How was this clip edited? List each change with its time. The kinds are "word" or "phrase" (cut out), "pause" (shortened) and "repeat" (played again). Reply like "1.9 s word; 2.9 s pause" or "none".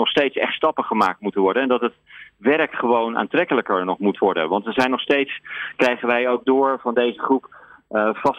none